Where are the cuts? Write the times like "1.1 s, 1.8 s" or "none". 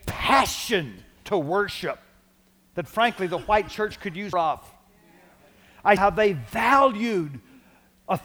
4.3 s, 6.0 s